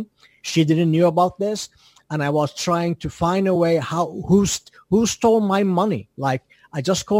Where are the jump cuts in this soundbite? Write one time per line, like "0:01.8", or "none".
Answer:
none